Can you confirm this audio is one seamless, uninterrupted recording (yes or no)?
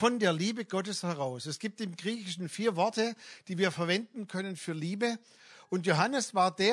yes